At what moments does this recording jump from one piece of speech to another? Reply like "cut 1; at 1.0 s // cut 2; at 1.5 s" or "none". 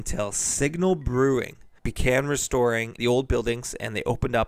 cut 1; at 1.8 s // cut 2; at 3.0 s